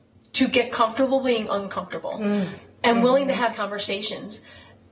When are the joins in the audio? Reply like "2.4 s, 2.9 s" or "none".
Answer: 3.5 s